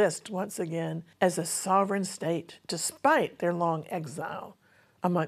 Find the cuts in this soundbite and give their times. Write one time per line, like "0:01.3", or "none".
0:01.1